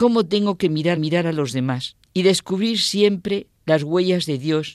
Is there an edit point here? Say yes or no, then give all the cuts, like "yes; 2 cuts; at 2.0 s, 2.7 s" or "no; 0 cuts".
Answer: yes; 3 cuts; at 1.0 s, 2.0 s, 3.6 s